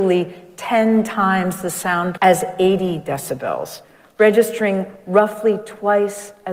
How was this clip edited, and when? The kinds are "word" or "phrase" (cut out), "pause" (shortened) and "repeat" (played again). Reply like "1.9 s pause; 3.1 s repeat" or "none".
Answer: 2.2 s word